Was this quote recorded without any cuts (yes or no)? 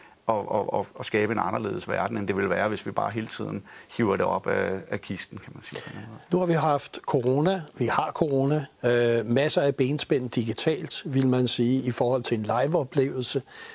no